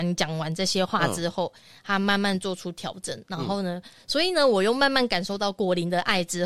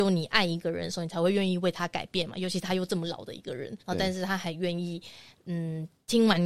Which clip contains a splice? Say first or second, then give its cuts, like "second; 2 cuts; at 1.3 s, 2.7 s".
second; 1 cut; at 3.8 s